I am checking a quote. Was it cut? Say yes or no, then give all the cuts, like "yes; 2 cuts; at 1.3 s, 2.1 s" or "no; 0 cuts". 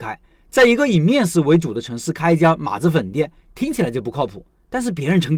no; 0 cuts